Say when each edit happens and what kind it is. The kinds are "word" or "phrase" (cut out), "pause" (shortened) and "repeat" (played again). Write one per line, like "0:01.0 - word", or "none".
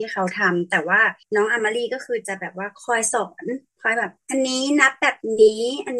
0:01.2 - pause
0:03.7 - pause
0:04.2 - pause